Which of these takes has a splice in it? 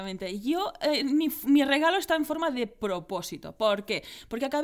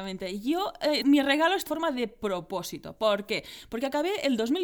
second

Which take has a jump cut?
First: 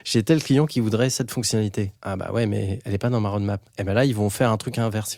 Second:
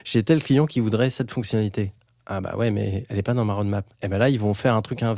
first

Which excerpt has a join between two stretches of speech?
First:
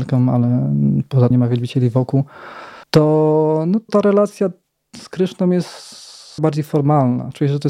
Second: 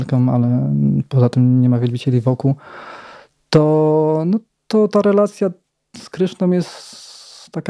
first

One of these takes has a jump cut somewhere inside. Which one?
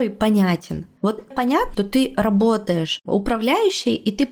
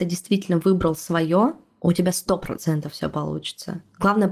first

